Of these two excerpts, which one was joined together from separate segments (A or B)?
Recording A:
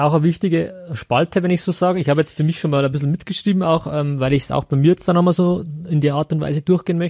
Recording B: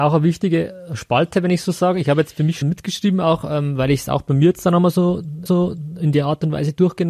B